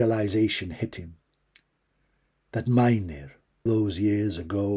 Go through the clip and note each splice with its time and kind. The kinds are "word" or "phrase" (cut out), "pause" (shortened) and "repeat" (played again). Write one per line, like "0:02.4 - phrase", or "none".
0:03.7 - word